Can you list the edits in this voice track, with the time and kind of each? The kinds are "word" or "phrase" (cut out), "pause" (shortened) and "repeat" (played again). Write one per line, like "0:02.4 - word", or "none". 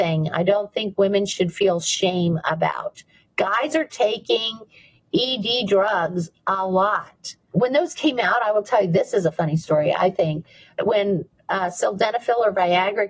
none